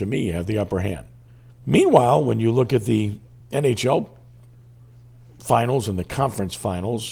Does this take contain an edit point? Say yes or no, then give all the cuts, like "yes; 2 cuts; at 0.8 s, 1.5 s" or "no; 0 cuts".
yes; 2 cuts; at 1.3 s, 3.4 s